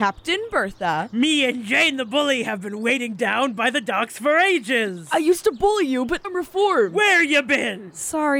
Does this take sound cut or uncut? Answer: cut